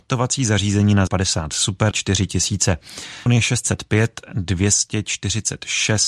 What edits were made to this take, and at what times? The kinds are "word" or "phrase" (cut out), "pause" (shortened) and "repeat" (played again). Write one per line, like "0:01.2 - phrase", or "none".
0:01.1 - word
0:01.9 - word
0:03.3 - word